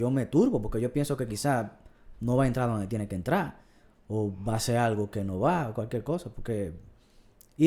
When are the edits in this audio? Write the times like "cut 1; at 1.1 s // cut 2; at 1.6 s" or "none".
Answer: none